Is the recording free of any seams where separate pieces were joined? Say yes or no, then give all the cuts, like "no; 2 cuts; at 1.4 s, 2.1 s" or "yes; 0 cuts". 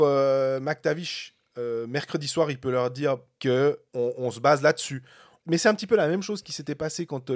yes; 0 cuts